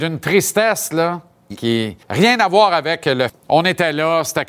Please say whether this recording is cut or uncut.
cut